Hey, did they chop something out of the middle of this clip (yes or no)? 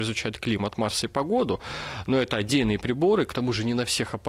no